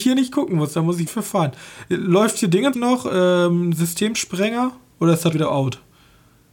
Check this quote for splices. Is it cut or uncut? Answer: cut